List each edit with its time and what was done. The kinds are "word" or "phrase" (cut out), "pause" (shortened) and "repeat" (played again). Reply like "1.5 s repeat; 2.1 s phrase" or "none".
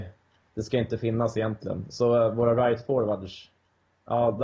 none